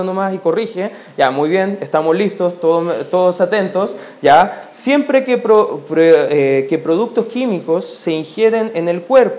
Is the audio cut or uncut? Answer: uncut